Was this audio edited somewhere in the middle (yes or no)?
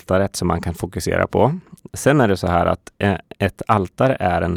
no